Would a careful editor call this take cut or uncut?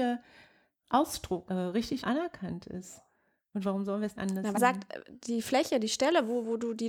cut